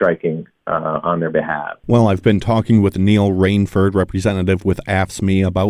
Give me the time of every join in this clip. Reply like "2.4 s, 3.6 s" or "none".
1.8 s